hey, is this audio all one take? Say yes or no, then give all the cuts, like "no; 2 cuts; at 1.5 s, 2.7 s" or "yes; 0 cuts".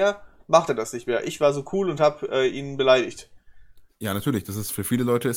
no; 1 cut; at 3.9 s